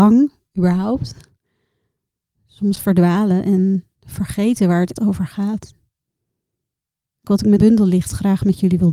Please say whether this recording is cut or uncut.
cut